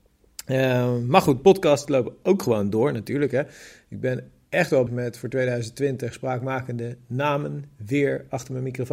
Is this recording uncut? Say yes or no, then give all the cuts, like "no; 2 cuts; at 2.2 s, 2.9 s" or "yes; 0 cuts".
no; 1 cut; at 4.9 s